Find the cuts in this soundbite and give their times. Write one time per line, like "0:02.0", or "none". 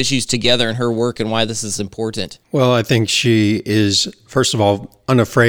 0:02.4